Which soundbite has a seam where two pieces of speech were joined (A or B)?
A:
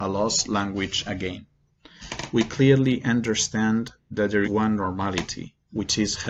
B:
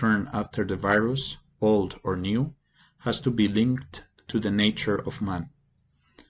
A